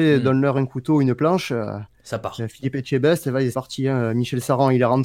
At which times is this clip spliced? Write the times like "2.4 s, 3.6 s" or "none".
3.5 s